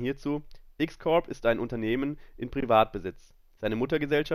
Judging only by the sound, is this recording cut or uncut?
uncut